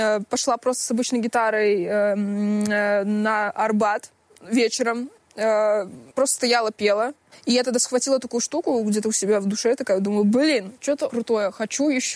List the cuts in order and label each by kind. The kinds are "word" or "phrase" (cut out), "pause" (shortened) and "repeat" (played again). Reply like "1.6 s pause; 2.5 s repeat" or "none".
6.1 s pause; 7.3 s pause; 11.1 s word